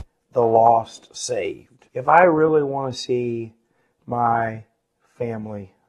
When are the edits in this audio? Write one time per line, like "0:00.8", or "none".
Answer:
0:01.9